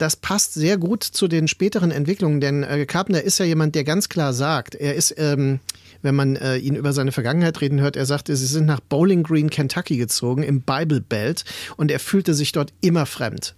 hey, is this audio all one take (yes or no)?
yes